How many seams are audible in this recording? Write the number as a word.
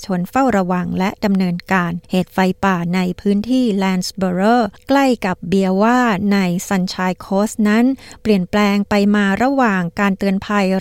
one